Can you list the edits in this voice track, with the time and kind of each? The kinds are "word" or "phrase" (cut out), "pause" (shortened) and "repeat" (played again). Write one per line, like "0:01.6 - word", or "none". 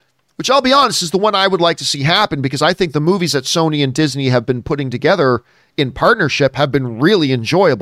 none